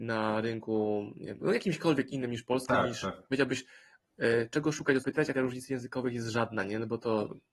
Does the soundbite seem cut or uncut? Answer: cut